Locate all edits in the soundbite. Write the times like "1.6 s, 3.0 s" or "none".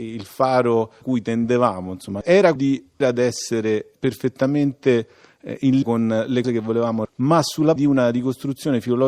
1.0 s, 2.6 s, 3.0 s, 5.8 s, 6.4 s, 7.1 s, 7.8 s